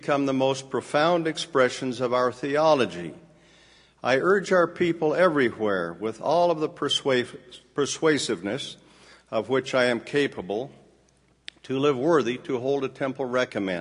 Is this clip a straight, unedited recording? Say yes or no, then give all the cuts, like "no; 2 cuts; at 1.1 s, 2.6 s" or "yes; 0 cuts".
yes; 0 cuts